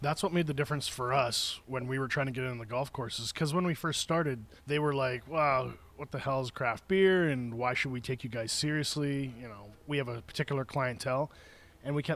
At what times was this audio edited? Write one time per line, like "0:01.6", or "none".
0:04.6
0:09.7